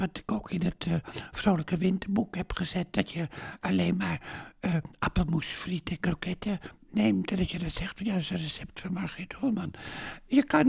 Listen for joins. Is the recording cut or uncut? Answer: uncut